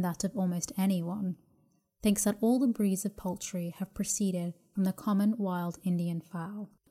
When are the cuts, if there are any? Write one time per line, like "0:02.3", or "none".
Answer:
none

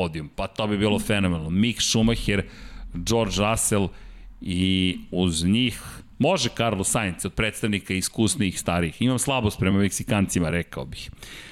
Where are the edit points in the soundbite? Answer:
none

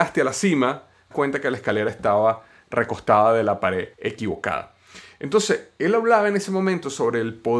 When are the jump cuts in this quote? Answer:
0:01.1
0:03.9

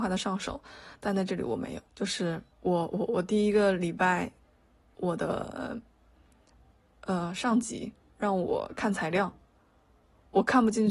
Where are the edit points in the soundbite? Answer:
0:01.9
0:02.5

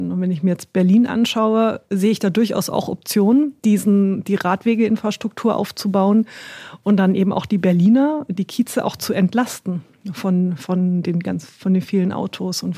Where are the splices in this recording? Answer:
0:03.6

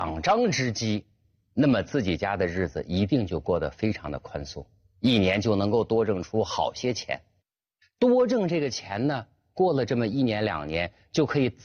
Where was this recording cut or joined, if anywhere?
none

